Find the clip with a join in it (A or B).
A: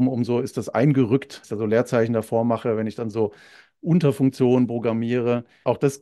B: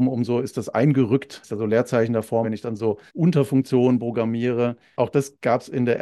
B